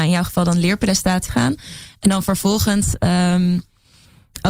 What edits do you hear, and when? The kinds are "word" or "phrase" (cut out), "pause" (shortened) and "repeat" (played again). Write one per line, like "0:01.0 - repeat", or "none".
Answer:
0:01.3 - word